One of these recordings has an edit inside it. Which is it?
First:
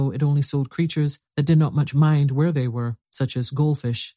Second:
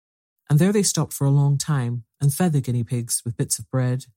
first; 2 cuts; at 1.3 s, 3.0 s

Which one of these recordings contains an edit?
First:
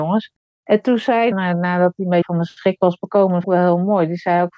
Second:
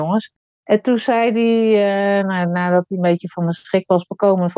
first; 3 cuts; at 1.3 s, 2.2 s, 3.4 s

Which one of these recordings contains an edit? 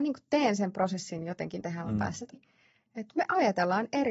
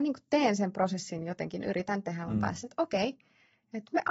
first; 2 cuts; at 1.6 s, 2.3 s

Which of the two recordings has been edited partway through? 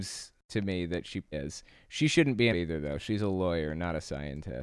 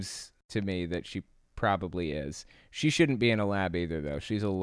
first; 2 cuts; at 1.3 s, 2.5 s

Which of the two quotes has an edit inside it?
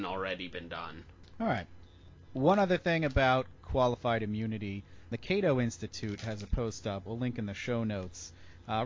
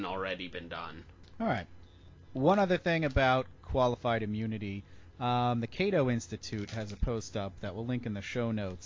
first; 2 cuts; at 5.1 s, 7.1 s

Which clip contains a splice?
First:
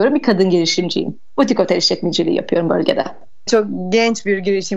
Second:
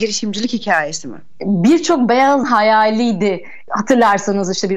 second; 1 cut; at 2.4 s

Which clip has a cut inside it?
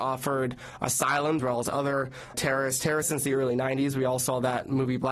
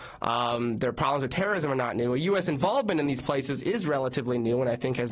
first; 3 cuts; at 1.4 s, 2.3 s, 3.0 s

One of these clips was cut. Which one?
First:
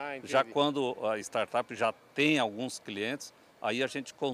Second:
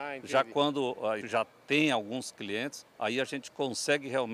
second; 2 cuts; at 1.2 s, 2.9 s

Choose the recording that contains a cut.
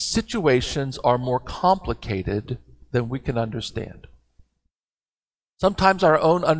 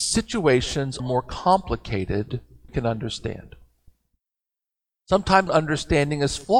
second; 3 cuts; at 1.0 s, 2.7 s, 5.5 s

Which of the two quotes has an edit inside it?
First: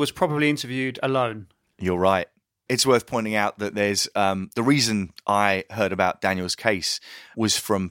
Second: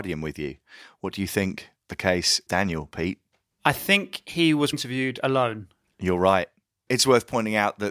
second; 3 cuts; at 1.9 s, 2.5 s, 4.7 s

